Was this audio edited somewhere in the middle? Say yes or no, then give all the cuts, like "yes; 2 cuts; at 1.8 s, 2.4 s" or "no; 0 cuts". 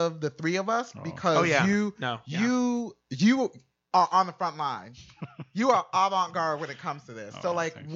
yes; 1 cut; at 3.0 s